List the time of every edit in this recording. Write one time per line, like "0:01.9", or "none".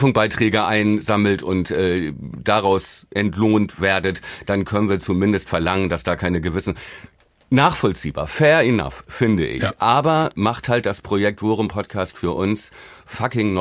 none